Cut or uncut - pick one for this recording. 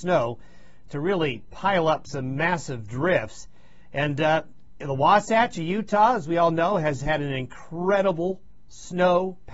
uncut